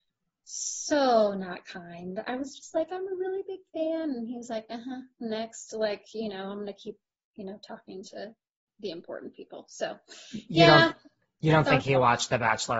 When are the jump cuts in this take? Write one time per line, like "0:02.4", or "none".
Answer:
none